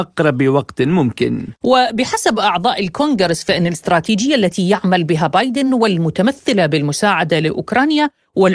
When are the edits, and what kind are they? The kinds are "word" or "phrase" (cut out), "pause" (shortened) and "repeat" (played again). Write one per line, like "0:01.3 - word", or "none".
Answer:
none